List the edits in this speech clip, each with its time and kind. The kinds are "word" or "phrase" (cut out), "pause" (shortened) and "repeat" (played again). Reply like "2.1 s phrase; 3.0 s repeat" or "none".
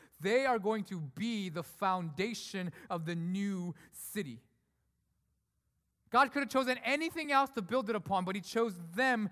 none